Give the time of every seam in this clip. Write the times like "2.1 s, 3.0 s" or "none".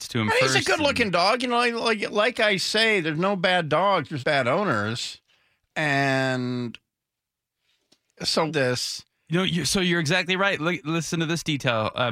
4.2 s, 8.5 s